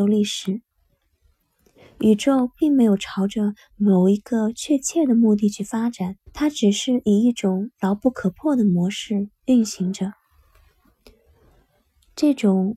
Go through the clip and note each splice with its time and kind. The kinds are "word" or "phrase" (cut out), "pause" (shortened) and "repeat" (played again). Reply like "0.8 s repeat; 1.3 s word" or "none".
6.3 s pause

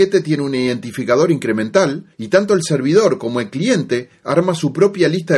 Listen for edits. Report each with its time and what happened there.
2.1 s pause

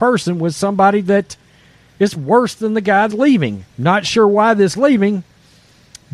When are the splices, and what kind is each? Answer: 2.2 s word; 3.1 s word; 3.7 s pause; 4.7 s word

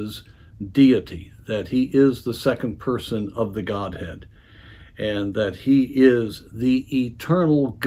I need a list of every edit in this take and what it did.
none

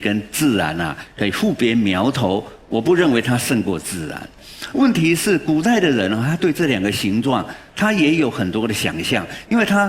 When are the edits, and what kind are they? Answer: none

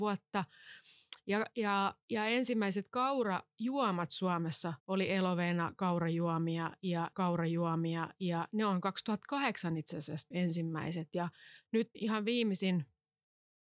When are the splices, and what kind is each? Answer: 2.0 s pause; 4.8 s pause; 7.1 s repeat; 10.3 s word; 11.9 s word

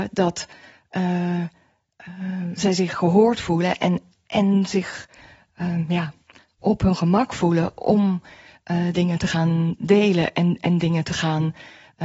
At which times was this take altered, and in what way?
none

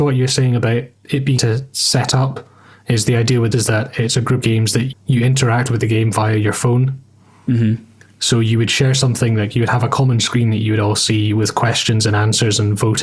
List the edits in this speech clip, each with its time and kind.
1.4 s word; 3.5 s word; 4.4 s word; 4.9 s word

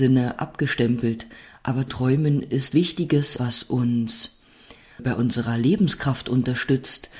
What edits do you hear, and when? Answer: 1.9 s word; 2.7 s phrase; 3.4 s word; 5.0 s word

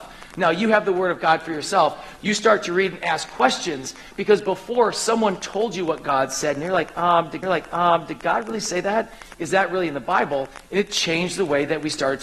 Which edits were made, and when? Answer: 7.4 s repeat

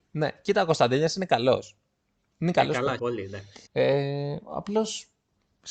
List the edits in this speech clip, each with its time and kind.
3.0 s word; 3.7 s pause

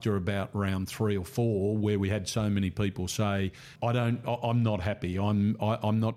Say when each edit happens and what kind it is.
3.8 s word

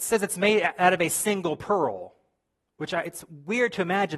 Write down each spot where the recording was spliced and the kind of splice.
none

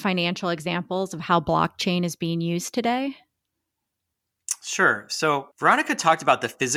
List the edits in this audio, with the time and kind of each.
5.5 s pause

